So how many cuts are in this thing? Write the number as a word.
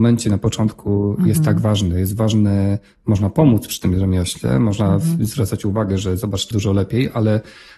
one